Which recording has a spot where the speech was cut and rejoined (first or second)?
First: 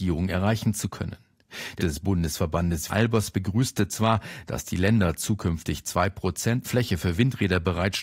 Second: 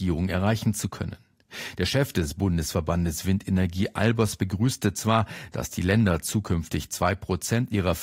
first